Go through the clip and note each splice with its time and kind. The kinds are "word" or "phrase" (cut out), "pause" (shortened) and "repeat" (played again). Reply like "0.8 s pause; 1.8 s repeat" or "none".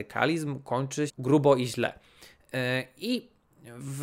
1.1 s word